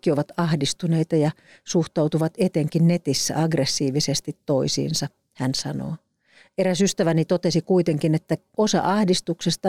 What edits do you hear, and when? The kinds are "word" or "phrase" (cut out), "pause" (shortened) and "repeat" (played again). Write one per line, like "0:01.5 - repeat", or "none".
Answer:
0:08.5 - word